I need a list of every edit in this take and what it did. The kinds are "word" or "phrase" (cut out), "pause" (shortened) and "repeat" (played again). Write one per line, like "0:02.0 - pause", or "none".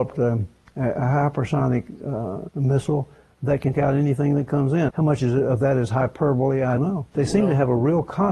0:02.5 - word
0:03.7 - word
0:04.9 - word
0:06.8 - word
0:07.1 - word

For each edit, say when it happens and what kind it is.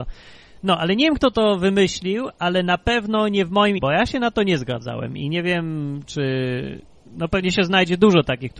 0:03.8 - word

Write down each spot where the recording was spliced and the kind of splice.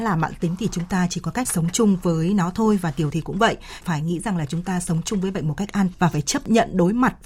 0:01.4 - word
0:03.1 - word
0:05.9 - word

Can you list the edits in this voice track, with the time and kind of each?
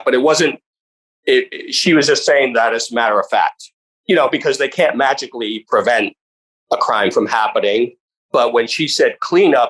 none

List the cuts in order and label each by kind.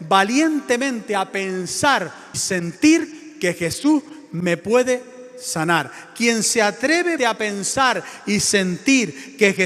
0:02.3 - word
0:07.2 - word

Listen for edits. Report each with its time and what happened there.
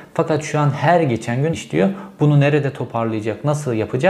0:01.5 - word

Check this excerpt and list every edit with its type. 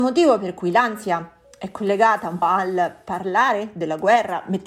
0:02.4 - word

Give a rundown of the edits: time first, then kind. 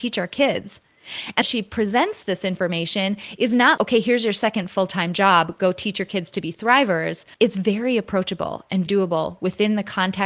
0:01.4 - phrase
0:03.8 - word
0:07.3 - pause
0:08.9 - word

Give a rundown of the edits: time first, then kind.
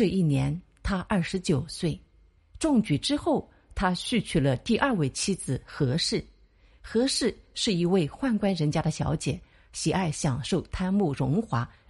0:02.4 - pause

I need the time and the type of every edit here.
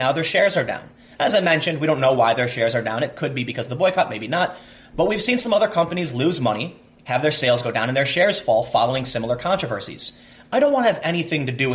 none

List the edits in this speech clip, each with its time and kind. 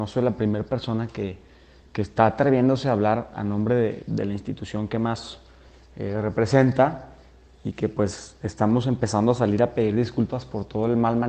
none

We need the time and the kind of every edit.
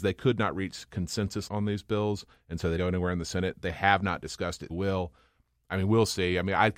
0:01.5 - phrase
0:02.8 - word
0:04.7 - phrase

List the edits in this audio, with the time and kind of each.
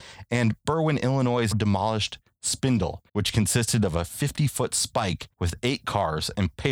0:01.5 - word
0:03.1 - pause
0:05.3 - pause

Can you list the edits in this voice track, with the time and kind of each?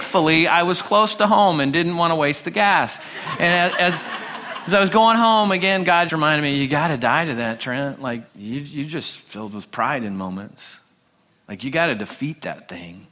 0:06.1 - word
0:08.3 - pause

